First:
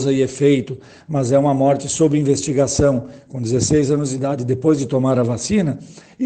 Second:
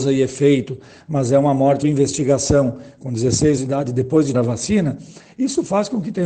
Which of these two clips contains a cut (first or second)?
second